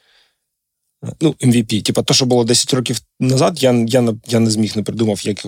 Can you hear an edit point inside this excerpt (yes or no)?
no